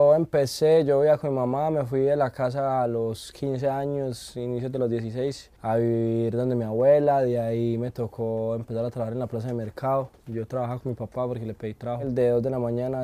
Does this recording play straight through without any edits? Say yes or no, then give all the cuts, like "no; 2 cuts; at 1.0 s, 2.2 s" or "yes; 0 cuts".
no; 1 cut; at 5.6 s